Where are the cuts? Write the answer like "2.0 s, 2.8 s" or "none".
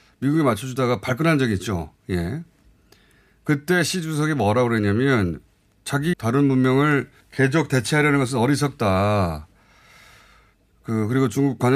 6.1 s, 7.2 s